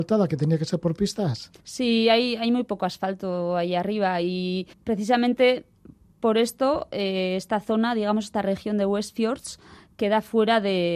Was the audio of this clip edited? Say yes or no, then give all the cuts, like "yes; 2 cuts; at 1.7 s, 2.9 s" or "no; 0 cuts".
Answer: yes; 2 cuts; at 1.6 s, 4.7 s